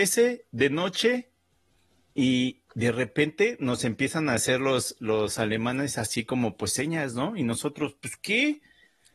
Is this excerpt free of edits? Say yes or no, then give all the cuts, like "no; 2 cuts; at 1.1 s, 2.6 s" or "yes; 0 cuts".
yes; 0 cuts